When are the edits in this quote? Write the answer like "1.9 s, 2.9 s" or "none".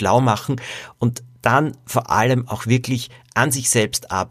none